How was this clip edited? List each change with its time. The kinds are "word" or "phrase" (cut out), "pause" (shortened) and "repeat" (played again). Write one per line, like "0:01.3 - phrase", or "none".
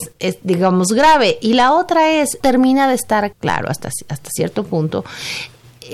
0:02.4 - word
0:03.3 - word